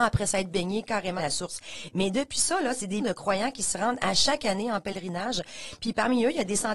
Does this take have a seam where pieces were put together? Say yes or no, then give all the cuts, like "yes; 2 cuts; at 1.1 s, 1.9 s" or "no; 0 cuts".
yes; 2 cuts; at 1.2 s, 3.0 s